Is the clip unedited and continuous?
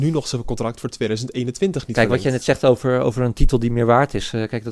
yes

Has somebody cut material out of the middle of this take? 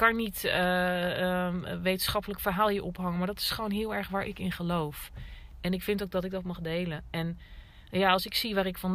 no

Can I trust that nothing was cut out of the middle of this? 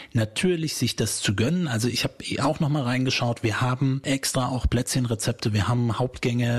yes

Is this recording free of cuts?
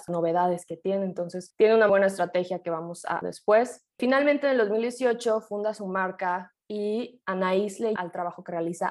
no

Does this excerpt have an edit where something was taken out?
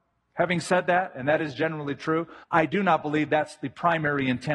yes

